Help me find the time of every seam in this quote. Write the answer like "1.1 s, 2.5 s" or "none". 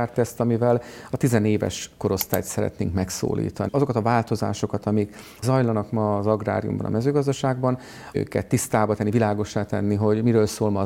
3.7 s, 5.4 s, 8.1 s